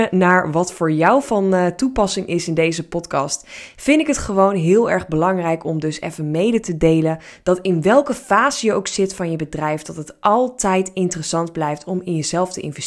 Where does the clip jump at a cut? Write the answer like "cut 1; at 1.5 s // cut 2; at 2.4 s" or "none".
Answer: none